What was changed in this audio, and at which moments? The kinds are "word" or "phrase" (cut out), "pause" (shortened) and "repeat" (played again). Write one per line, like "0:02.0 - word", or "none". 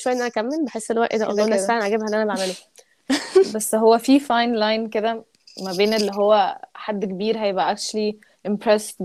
none